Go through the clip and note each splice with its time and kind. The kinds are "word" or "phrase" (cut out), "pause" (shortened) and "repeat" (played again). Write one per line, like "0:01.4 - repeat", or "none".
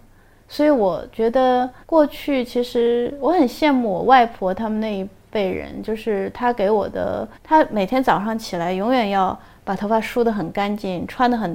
0:01.8 - pause
0:07.3 - pause